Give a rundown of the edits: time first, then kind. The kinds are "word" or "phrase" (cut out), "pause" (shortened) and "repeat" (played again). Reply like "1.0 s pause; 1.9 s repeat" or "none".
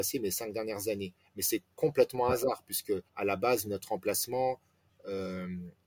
3.1 s pause